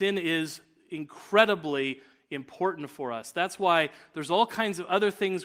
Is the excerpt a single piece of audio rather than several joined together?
yes; 0 cuts

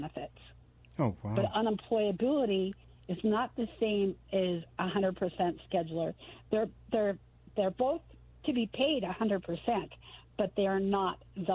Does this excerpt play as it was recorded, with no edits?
yes; 0 cuts

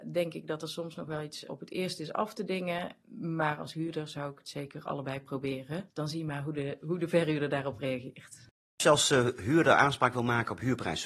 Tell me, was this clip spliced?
no; 0 cuts

